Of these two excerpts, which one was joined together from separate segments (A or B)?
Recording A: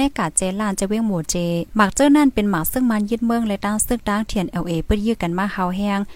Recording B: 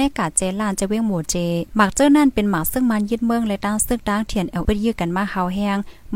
B